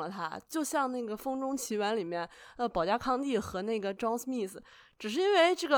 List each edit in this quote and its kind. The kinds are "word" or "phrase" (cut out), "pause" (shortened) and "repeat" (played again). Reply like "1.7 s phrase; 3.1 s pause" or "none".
none